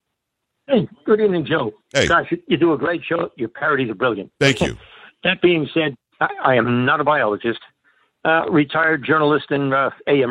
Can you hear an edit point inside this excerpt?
no; 0 cuts

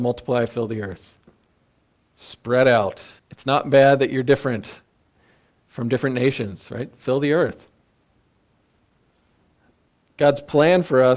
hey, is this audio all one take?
no; 1 cut; at 3.2 s

